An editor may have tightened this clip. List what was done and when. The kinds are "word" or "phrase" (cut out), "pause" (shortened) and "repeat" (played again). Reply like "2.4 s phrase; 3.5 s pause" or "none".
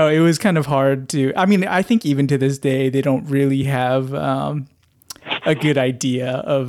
none